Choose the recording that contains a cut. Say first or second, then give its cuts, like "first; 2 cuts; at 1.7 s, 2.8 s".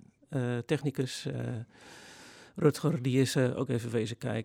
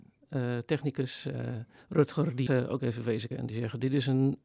second; 3 cuts; at 1.8 s, 2.5 s, 3.3 s